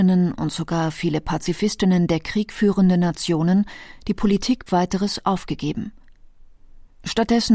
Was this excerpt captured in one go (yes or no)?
no